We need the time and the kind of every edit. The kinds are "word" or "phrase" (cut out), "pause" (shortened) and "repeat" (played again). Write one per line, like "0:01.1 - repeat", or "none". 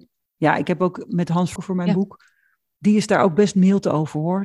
0:01.6 - phrase